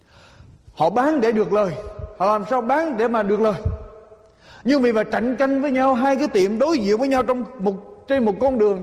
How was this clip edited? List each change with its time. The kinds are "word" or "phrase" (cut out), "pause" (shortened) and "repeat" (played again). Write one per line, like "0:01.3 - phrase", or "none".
none